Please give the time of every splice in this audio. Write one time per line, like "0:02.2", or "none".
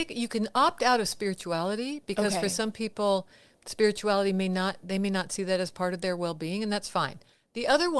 none